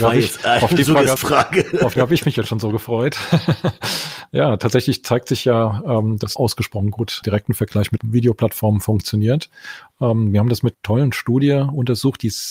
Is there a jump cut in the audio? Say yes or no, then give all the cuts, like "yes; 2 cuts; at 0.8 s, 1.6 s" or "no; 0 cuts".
yes; 6 cuts; at 1.2 s, 2.0 s, 6.4 s, 7.2 s, 8.0 s, 10.7 s